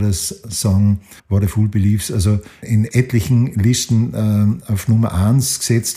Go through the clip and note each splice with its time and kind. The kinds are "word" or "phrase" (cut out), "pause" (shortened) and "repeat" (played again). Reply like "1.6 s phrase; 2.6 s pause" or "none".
1.2 s pause